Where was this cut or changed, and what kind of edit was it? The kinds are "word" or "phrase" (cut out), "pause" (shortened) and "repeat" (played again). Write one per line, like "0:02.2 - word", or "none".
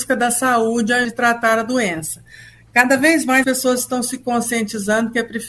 0:01.0 - word
0:03.4 - word